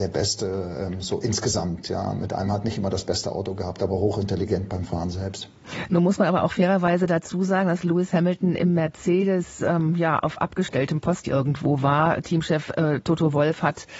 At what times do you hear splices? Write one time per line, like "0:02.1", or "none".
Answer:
0:11.2